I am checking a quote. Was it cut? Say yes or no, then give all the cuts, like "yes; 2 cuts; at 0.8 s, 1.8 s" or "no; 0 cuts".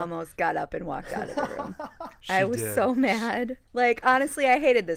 yes; 1 cut; at 3.7 s